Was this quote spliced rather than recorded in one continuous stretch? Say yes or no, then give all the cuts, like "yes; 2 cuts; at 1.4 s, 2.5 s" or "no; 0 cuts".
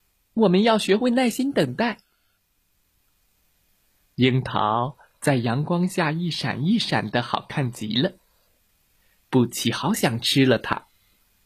no; 0 cuts